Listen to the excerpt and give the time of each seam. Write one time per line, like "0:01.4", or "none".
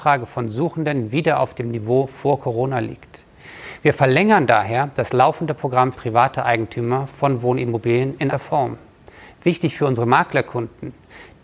0:05.9
0:08.3